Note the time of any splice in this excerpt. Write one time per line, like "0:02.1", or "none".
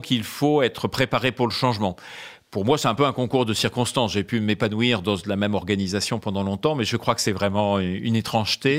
none